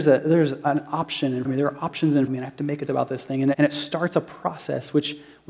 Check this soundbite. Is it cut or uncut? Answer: cut